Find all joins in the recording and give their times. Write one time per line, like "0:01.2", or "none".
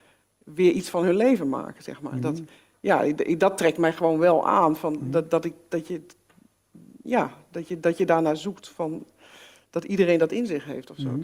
none

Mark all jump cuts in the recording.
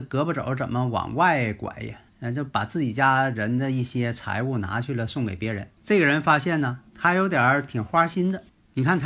0:02.1
0:05.8
0:06.9

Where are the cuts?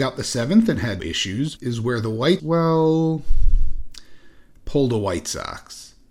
0:01.0
0:01.6
0:02.4

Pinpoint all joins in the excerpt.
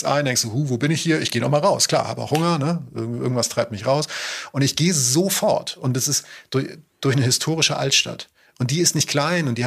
none

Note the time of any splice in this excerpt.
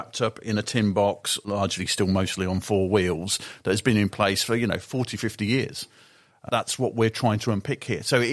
none

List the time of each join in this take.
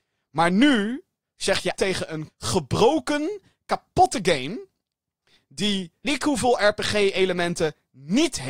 0:01.7
0:02.3
0:06.0

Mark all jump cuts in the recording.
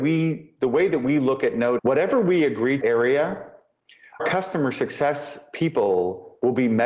0:01.8
0:02.8
0:04.2

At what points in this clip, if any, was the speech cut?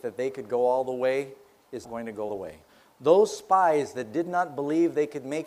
0:01.8
0:02.3
0:02.7

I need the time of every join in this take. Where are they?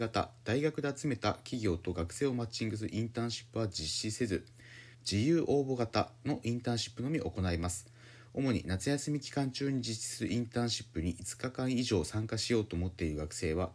0:04.9

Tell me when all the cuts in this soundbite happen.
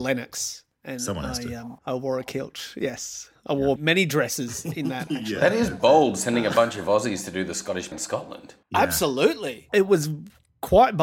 0:01.8
0:03.8
0:07.9
0:08.6

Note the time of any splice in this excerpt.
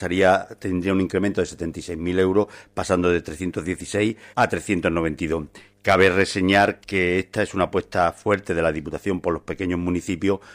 0:04.3
0:06.8

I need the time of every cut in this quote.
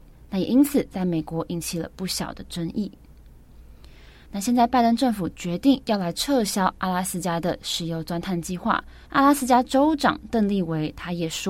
0:09.0

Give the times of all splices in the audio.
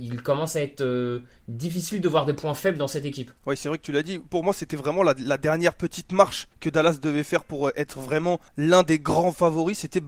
0:03.4
0:06.5
0:08.5

